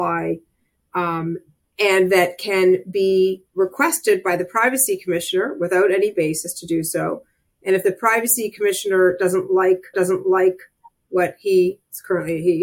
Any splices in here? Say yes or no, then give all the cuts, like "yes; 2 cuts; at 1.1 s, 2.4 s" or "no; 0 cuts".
yes; 2 cuts; at 3.5 s, 9.9 s